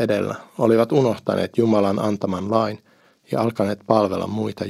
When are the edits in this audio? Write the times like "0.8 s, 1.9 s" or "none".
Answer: none